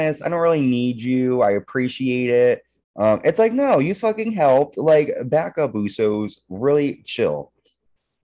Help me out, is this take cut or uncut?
uncut